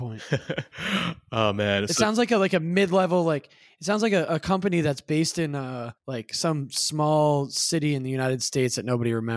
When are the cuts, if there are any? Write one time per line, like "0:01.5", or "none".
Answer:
0:06.0